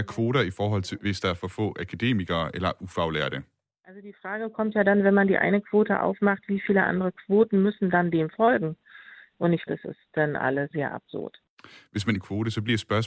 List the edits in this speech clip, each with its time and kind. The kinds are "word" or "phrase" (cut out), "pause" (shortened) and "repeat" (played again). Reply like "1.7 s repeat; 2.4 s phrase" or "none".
1.0 s word; 9.7 s word; 10.7 s word; 12.2 s word